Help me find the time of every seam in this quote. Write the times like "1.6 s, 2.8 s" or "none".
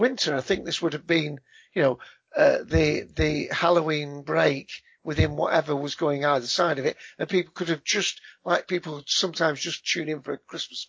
none